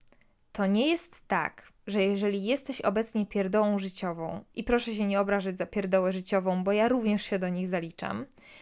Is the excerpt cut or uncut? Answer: uncut